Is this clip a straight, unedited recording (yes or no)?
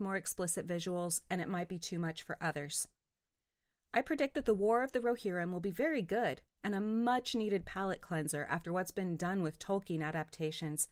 yes